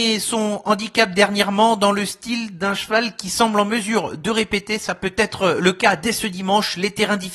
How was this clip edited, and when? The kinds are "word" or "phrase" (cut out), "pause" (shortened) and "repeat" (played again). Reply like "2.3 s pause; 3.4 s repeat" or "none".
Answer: none